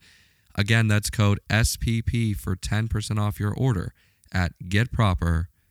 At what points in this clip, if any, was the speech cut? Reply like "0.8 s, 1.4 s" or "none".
none